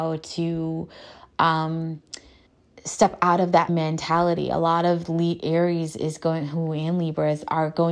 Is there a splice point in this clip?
yes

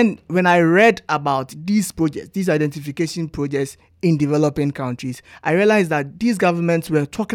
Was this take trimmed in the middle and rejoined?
no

